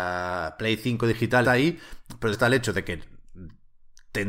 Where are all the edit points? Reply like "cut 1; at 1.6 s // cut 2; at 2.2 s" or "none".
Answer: cut 1; at 1.4 s // cut 2; at 2.3 s